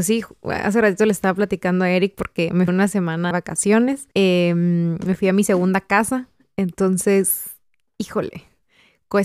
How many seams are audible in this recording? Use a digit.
3